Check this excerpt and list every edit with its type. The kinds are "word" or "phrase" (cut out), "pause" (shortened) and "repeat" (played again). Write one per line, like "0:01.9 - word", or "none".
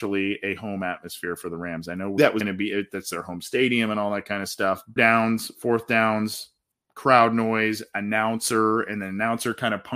0:02.2 - word
0:05.0 - phrase
0:06.7 - pause